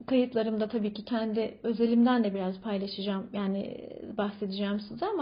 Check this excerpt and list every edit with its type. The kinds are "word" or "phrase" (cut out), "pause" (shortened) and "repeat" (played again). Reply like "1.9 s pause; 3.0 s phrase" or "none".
none